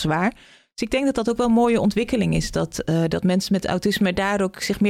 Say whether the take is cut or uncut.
uncut